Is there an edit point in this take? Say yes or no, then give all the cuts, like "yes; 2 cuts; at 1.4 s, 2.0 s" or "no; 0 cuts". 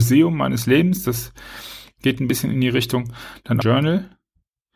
yes; 1 cut; at 3.6 s